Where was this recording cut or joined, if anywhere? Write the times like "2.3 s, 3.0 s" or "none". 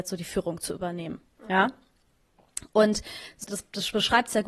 3.5 s